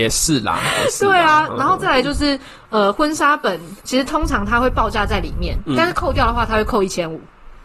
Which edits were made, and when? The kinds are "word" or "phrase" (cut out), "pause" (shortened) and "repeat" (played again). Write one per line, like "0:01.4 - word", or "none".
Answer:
0:03.8 - pause